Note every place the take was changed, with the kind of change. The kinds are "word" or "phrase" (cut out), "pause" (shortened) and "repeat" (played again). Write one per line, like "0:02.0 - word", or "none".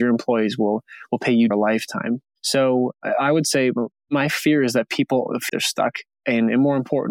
0:01.5 - phrase
0:05.5 - word